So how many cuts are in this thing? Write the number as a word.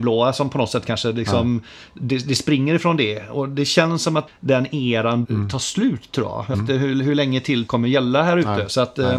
four